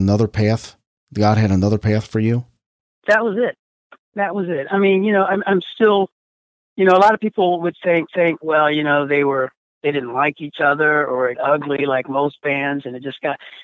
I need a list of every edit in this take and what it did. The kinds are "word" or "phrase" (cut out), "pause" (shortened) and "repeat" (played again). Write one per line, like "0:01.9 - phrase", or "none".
0:08.1 - repeat
0:11.3 - word